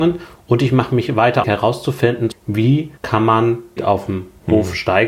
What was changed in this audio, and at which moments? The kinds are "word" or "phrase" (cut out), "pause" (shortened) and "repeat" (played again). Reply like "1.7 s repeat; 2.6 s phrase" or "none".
1.4 s phrase; 3.0 s pause; 3.8 s word